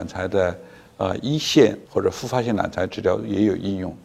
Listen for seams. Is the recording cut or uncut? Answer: cut